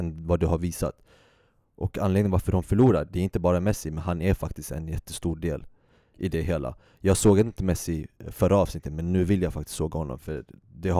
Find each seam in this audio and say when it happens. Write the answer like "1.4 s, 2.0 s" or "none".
none